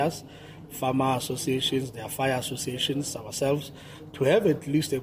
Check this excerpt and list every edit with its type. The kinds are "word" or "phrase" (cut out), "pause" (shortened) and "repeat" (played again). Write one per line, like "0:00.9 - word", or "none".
none